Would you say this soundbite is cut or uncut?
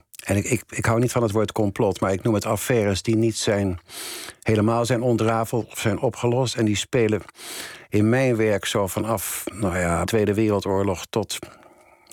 cut